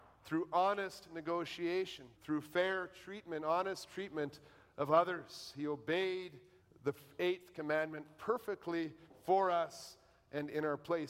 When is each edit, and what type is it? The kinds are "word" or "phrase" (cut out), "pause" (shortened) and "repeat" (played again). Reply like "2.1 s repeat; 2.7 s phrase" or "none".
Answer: 2.1 s word; 6.6 s pause